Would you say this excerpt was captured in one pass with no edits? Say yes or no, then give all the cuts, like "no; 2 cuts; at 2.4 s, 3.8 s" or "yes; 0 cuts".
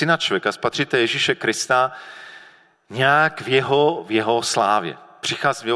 yes; 0 cuts